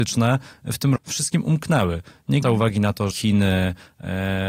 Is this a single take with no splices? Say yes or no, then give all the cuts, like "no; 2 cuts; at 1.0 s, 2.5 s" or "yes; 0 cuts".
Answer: no; 3 cuts; at 1.0 s, 2.4 s, 3.1 s